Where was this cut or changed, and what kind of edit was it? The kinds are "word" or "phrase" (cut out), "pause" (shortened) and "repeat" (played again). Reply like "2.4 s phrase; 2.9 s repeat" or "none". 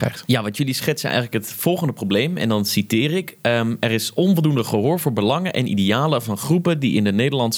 none